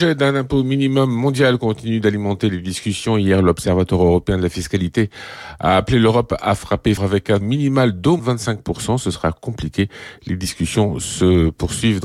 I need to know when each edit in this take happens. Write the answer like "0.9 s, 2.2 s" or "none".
7.0 s, 7.4 s, 8.2 s

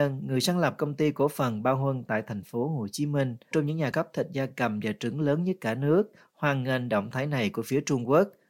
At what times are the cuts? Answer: 3.5 s, 3.9 s

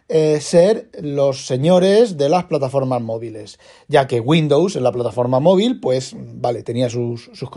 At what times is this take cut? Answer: none

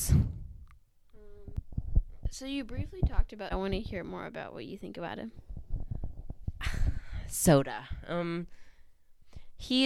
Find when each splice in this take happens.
3.5 s

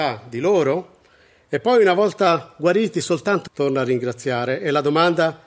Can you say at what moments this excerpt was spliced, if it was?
3.5 s

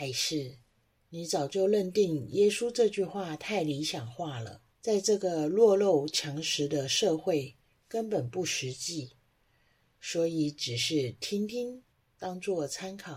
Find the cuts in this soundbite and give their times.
4.7 s, 11.9 s

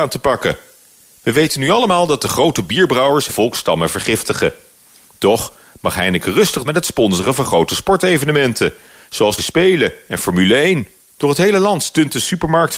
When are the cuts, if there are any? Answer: 3.3 s, 6.6 s, 9.4 s, 11.1 s

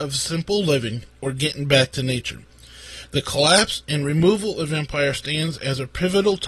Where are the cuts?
none

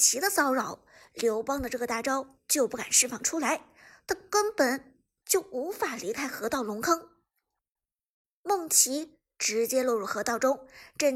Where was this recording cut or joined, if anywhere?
none

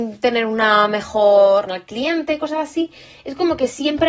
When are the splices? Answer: 1.7 s

